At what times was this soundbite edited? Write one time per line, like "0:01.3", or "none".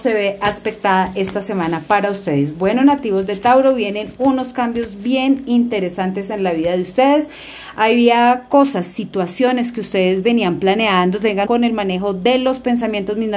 0:11.4